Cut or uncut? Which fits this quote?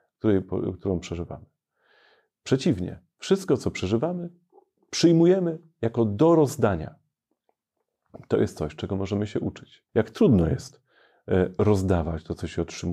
cut